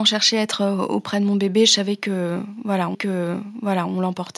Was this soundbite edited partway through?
yes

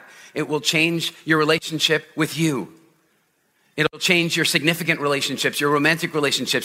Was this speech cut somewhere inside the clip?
no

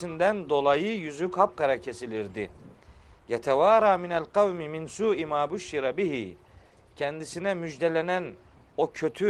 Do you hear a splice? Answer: no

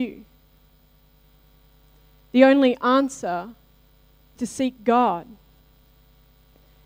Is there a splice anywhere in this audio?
yes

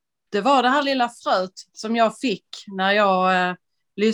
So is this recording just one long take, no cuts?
yes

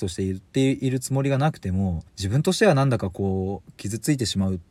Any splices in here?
yes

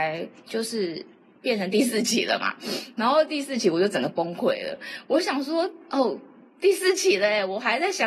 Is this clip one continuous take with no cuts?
yes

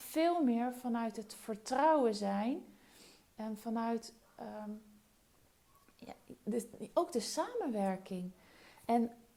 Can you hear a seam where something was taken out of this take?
no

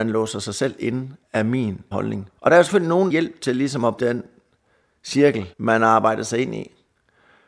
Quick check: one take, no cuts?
no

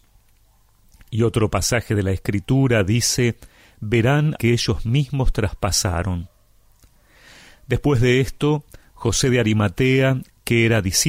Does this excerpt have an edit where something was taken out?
yes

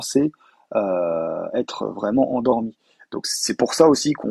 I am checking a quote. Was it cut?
no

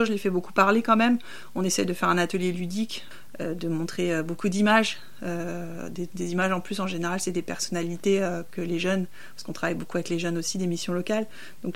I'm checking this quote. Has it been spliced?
no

